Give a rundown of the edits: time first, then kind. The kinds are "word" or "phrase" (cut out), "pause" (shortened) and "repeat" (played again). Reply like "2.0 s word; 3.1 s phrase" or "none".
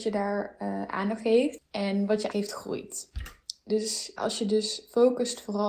1.2 s word; 2.3 s word; 4.2 s word